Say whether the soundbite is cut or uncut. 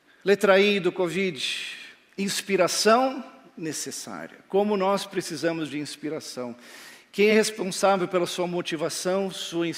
uncut